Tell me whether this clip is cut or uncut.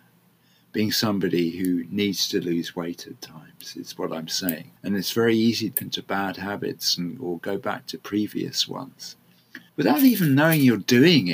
cut